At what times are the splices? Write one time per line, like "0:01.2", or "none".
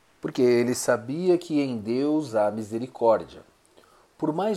none

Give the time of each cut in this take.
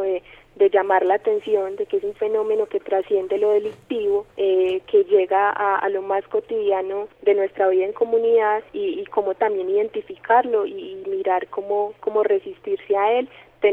0:04.3
0:07.1
0:08.7

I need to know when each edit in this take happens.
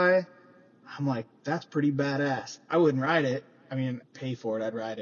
0:04.0

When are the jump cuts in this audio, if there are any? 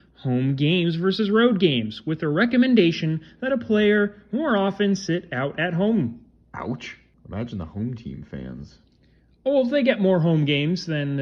none

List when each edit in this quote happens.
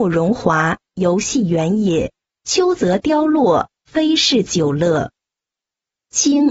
0:02.3

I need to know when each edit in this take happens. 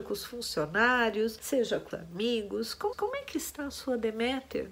0:01.9
0:02.9

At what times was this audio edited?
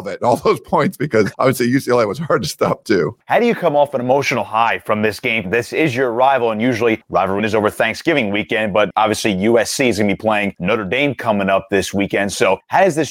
0:05.4
0:07.4

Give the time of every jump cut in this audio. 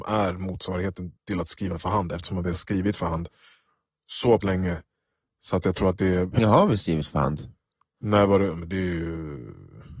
0:01.2
0:04.4
0:06.4

